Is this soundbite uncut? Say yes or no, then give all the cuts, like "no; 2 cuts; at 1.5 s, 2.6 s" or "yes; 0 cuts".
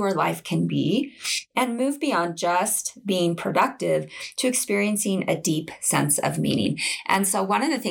yes; 0 cuts